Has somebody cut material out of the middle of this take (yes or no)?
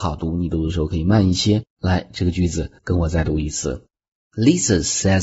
yes